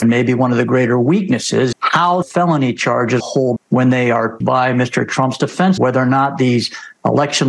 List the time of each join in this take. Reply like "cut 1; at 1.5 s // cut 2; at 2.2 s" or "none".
cut 1; at 1.7 s // cut 2; at 2.2 s // cut 3; at 3.2 s // cut 4; at 3.6 s // cut 5; at 4.4 s // cut 6; at 5.8 s